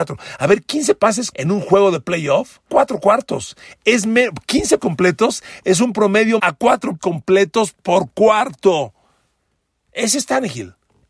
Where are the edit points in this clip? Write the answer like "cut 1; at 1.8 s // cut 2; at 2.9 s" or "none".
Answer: cut 1; at 1.3 s // cut 2; at 2.7 s // cut 3; at 4.8 s // cut 4; at 6.4 s // cut 5; at 7.0 s